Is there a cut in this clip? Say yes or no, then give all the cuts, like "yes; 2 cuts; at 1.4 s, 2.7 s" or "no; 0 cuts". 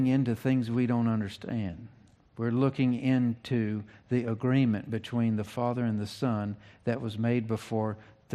no; 0 cuts